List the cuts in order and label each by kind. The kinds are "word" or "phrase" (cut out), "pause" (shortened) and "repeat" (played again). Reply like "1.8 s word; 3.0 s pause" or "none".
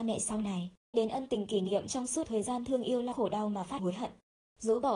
0.9 s word; 2.2 s word; 3.1 s word; 3.8 s word